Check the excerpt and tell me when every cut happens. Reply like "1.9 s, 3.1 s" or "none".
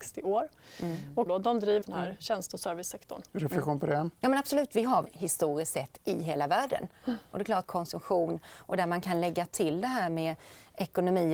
1.3 s, 1.8 s, 3.3 s, 4.2 s, 5.0 s, 7.7 s